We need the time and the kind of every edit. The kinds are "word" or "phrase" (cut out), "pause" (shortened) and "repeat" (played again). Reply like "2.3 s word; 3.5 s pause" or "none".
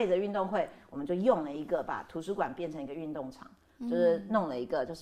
none